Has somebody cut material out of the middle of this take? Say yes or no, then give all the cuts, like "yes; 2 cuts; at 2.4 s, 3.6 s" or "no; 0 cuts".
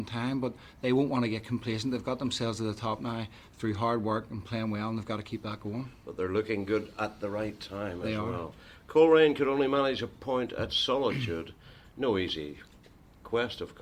no; 0 cuts